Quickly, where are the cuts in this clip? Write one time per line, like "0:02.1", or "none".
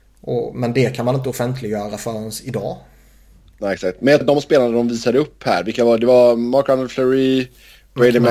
0:04.2